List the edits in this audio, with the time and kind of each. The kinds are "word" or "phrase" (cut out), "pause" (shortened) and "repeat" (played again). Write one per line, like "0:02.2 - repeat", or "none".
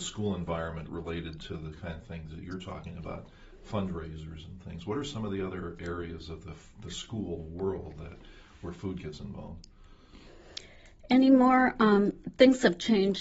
0:01.4 - phrase